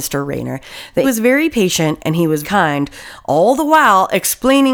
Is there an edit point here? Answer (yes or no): yes